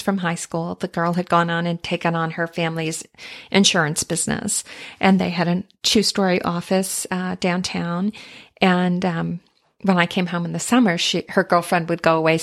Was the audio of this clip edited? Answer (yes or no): no